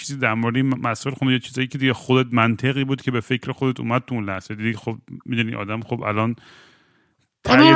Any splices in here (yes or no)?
no